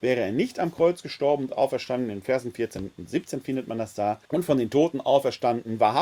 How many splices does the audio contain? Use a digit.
1